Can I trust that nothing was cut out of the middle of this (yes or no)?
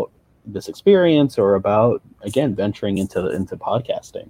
yes